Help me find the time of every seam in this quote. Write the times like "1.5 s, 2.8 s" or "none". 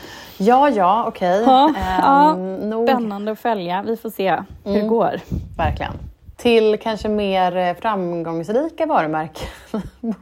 6.3 s